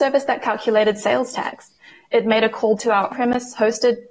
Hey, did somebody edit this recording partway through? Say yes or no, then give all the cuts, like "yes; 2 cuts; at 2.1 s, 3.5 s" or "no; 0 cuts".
yes; 2 cuts; at 2.8 s, 3.1 s